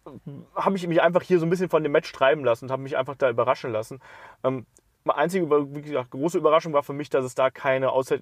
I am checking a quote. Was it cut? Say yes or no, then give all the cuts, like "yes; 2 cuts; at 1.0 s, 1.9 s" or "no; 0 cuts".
no; 0 cuts